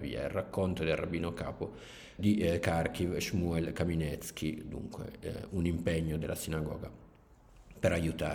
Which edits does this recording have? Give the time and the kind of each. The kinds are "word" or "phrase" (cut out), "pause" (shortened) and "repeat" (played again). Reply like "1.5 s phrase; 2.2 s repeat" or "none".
2.2 s word